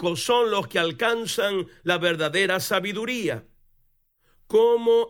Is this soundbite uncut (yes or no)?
yes